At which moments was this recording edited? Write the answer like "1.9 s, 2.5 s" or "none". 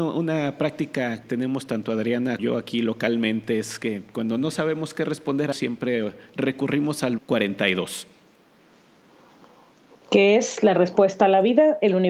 1.2 s, 2.4 s, 5.5 s, 7.2 s